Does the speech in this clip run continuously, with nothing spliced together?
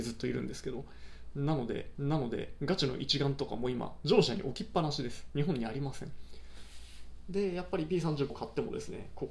no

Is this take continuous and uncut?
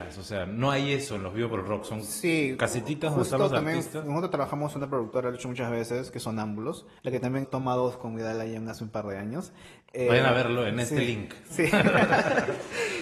no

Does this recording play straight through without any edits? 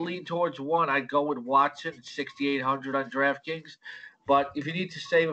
yes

